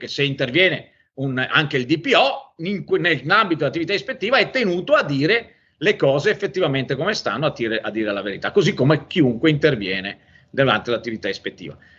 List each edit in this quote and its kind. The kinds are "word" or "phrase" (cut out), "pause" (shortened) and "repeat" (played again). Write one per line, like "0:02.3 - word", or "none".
none